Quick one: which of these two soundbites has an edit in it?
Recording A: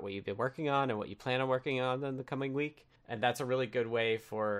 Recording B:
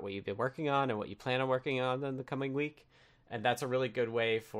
A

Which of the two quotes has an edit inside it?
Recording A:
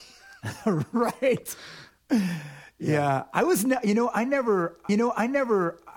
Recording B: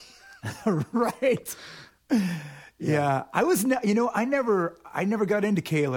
A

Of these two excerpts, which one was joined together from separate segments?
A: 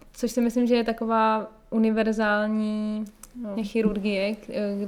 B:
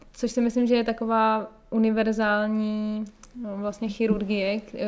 A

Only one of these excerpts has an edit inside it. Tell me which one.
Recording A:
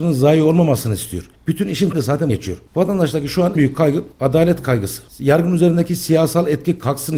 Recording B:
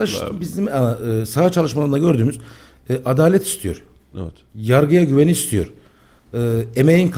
A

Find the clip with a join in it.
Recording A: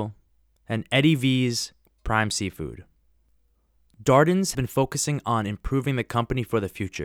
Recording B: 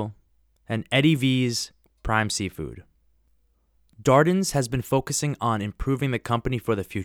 A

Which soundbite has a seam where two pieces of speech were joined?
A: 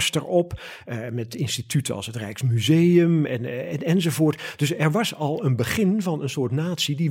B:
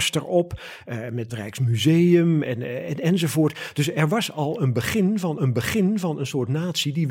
B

